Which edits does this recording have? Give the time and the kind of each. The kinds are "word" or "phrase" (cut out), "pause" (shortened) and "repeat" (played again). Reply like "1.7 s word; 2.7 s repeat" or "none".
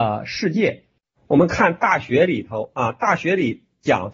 none